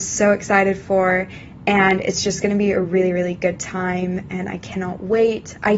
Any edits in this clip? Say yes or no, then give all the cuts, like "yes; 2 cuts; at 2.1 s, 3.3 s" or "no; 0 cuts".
no; 0 cuts